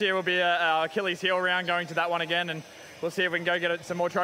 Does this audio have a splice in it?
no; 0 cuts

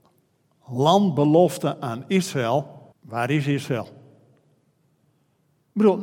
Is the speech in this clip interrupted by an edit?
yes; 1 cut; at 2.9 s

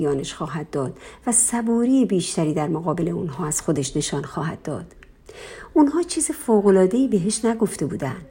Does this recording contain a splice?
no; 0 cuts

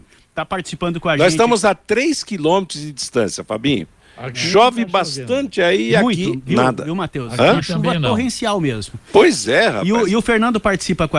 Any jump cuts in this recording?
no; 0 cuts

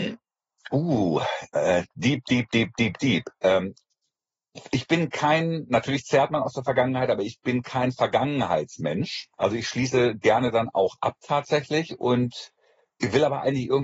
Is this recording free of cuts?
no; 2 cuts; at 1.9 s, 9.3 s

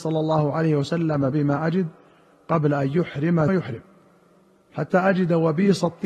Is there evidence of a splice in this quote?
yes; 2 cuts; at 1.3 s, 3.5 s

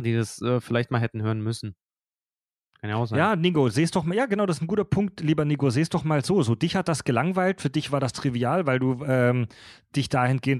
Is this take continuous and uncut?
yes; 0 cuts

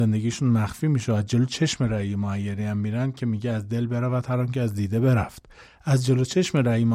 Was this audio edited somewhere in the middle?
yes; 1 cut; at 5.6 s

